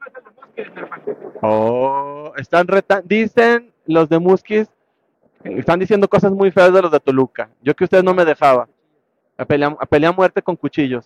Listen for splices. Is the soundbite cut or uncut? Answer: uncut